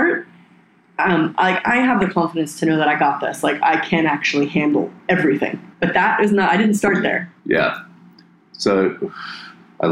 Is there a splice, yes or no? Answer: yes